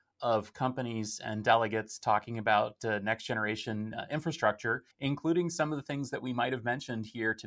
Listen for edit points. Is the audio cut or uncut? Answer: cut